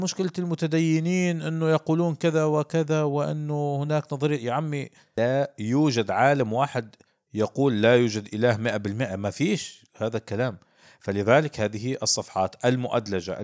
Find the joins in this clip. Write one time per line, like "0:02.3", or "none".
none